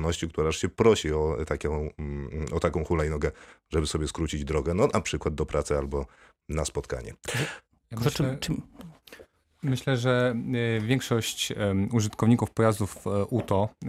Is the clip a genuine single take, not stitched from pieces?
yes; 0 cuts

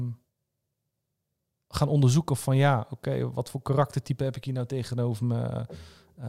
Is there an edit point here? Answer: no; 0 cuts

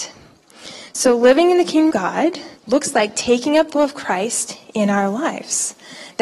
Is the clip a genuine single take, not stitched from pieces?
no; 3 cuts; at 1.9 s, 2.6 s, 3.7 s

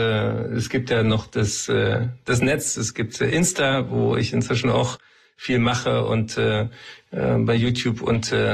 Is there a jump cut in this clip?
no; 0 cuts

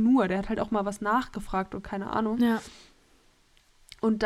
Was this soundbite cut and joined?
no; 0 cuts

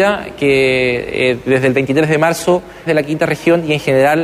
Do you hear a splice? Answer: yes; 1 cut; at 2.9 s

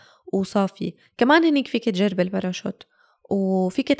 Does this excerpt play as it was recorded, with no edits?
yes; 0 cuts

